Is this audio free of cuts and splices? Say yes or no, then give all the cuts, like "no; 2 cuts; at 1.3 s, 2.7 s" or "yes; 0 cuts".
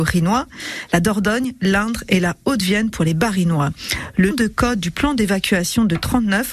no; 1 cut; at 4.3 s